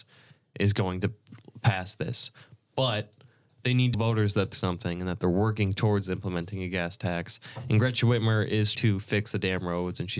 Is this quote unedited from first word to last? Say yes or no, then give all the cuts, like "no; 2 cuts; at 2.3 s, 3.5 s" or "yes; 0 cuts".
no; 3 cuts; at 3.9 s, 4.5 s, 8.7 s